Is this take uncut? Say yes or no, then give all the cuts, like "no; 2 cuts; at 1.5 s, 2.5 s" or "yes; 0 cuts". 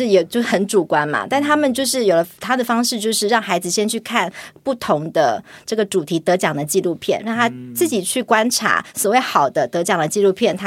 yes; 0 cuts